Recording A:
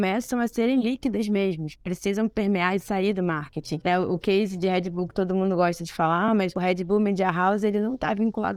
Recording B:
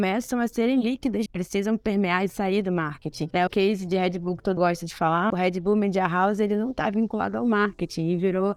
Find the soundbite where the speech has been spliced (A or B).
B